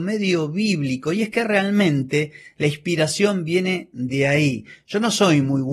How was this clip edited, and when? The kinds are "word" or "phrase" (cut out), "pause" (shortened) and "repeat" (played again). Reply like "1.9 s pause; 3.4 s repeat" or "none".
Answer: none

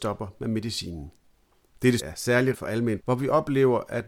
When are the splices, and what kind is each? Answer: 2.0 s word; 2.5 s word; 3.0 s word

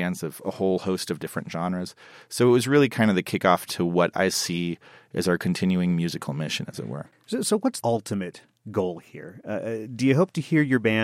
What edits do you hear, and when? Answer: 7.8 s word

